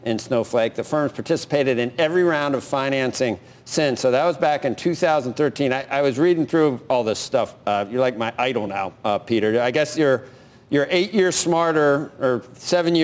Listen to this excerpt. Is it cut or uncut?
uncut